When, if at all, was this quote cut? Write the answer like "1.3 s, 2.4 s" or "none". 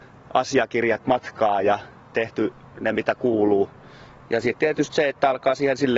2.0 s